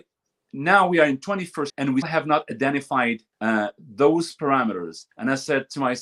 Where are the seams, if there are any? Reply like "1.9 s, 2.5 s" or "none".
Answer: 1.7 s, 2.0 s, 3.3 s, 5.1 s